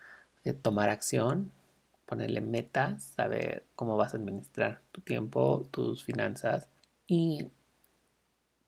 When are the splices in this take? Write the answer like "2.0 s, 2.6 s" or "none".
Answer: 4.9 s, 6.8 s